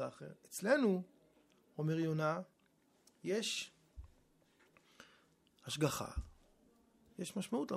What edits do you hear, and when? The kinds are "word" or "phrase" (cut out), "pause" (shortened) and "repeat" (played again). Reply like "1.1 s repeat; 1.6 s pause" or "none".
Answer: none